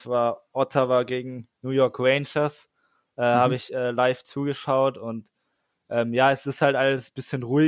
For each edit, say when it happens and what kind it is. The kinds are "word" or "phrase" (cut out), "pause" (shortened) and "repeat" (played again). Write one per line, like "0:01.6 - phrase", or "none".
none